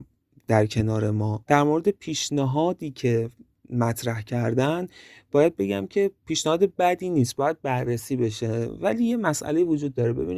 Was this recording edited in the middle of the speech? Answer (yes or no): no